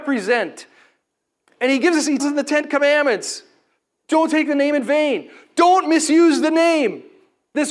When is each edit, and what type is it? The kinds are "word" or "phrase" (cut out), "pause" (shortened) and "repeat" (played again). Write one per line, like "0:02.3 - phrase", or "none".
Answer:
0:02.2 - word